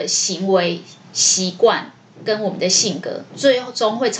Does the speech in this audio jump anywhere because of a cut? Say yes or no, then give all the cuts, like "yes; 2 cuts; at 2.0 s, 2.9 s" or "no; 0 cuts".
no; 0 cuts